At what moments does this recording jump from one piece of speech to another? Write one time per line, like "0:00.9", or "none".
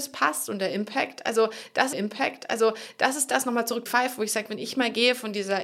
0:01.9
0:03.9